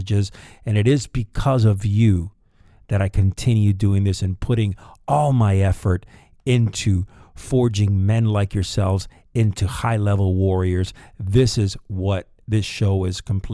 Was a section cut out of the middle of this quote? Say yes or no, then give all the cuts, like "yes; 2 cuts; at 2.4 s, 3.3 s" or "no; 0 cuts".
no; 0 cuts